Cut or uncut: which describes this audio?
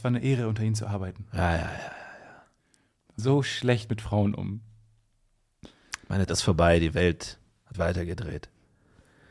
cut